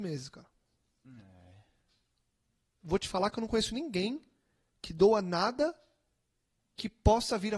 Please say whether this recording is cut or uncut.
uncut